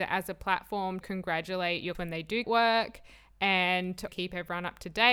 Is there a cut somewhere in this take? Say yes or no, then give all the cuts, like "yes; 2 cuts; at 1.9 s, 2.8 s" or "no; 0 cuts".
yes; 4 cuts; at 1.0 s, 1.9 s, 2.4 s, 4.1 s